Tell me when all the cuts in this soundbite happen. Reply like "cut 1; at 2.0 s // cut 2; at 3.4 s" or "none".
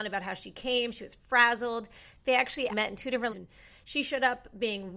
cut 1; at 2.7 s // cut 2; at 3.3 s